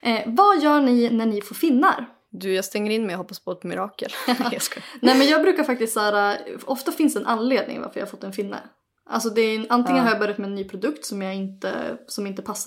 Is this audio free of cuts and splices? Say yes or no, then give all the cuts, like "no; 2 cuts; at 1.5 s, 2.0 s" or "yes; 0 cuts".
yes; 0 cuts